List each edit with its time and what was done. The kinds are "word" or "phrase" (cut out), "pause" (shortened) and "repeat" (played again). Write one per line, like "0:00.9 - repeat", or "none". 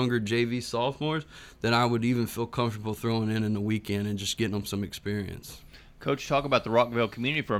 none